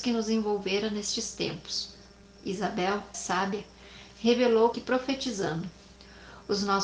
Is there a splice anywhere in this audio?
yes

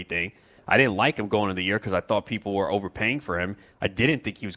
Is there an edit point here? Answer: no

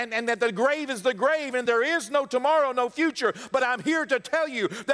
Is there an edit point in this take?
no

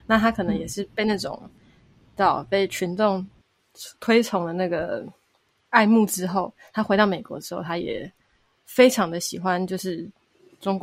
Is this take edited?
no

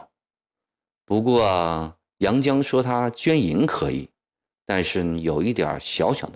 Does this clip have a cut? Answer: no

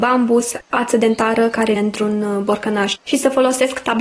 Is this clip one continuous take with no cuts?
no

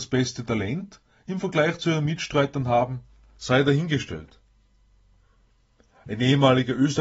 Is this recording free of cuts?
yes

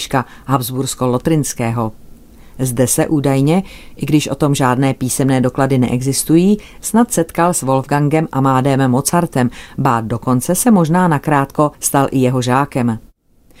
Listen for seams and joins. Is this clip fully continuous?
no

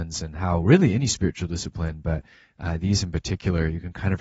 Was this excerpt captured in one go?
yes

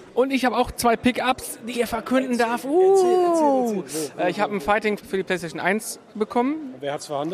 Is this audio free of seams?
no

